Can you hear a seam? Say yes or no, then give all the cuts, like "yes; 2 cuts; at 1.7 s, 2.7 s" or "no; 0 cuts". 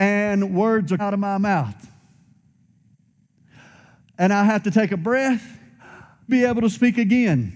yes; 2 cuts; at 1.0 s, 6.3 s